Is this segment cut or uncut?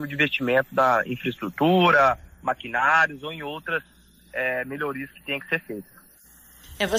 uncut